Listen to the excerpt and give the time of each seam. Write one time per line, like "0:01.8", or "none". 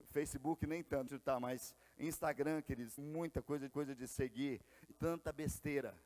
0:01.1
0:03.0
0:03.7
0:04.9